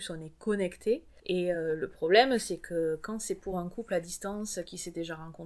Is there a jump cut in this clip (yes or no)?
no